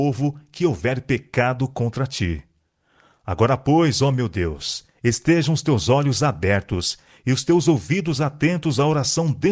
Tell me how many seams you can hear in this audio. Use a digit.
0